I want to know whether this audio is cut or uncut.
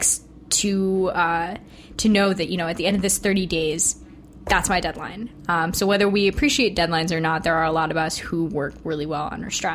uncut